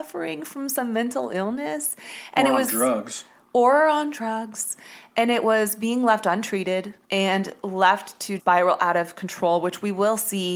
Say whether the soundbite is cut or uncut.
cut